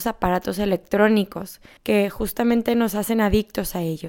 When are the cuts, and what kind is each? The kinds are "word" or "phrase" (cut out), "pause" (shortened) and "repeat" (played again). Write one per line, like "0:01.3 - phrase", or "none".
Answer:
0:01.8 - pause